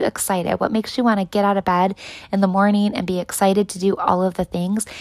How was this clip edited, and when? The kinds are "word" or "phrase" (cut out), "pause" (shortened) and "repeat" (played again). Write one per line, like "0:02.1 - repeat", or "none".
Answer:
none